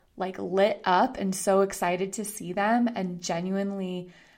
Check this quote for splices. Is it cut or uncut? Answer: uncut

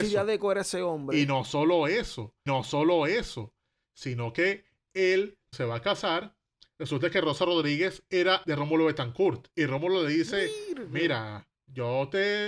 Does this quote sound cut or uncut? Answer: cut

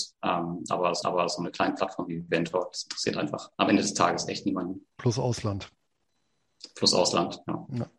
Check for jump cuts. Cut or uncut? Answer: cut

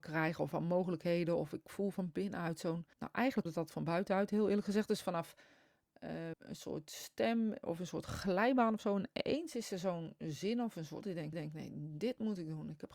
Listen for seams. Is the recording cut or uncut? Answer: cut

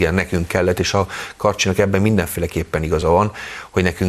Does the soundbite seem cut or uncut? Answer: uncut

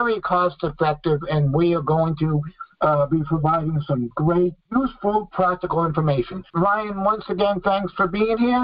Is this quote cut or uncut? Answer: cut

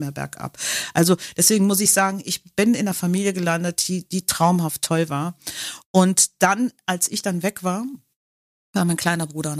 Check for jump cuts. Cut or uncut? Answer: uncut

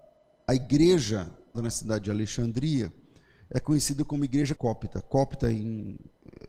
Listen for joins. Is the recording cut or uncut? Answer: cut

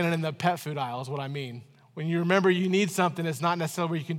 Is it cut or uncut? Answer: uncut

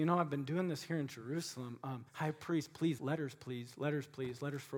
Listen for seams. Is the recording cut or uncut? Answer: cut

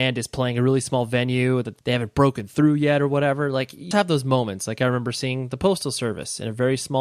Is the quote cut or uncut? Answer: cut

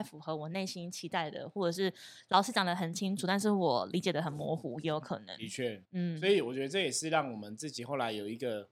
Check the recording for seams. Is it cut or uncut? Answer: cut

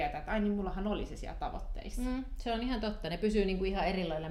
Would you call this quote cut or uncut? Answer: uncut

